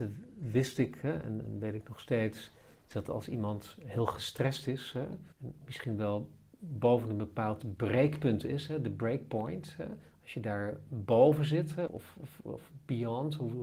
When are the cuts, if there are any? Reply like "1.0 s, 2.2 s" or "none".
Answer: 5.3 s, 11.9 s